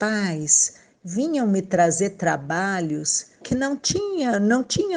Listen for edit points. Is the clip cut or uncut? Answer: cut